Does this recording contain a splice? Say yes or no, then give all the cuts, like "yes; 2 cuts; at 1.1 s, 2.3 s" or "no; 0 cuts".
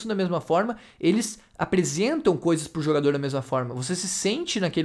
no; 0 cuts